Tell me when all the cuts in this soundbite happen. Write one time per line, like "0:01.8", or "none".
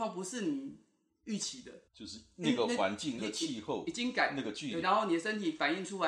0:01.9
0:03.2
0:04.8